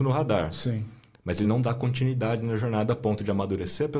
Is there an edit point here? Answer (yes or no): no